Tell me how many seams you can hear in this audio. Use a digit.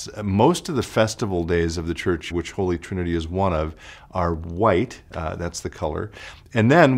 1